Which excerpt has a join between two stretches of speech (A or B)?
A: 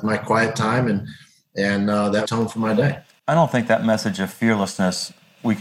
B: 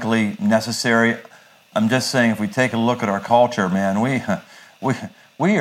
A